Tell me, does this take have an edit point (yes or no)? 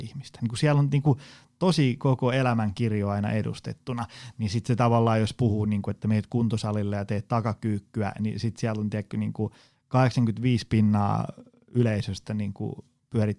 no